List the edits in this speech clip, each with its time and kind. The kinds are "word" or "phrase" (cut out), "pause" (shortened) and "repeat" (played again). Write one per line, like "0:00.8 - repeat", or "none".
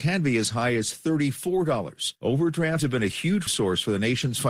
0:02.8 - word
0:03.5 - word